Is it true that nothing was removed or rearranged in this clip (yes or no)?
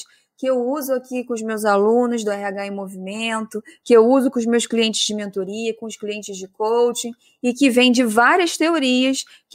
yes